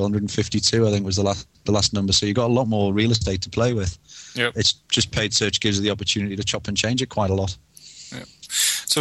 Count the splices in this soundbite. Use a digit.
1